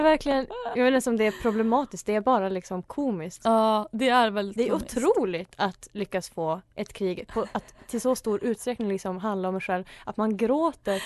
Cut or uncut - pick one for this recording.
cut